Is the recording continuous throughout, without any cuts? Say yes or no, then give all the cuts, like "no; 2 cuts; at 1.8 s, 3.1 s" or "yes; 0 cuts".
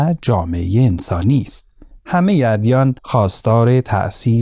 no; 2 cuts; at 1.9 s, 3.0 s